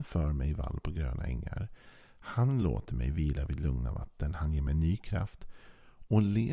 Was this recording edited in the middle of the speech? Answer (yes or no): no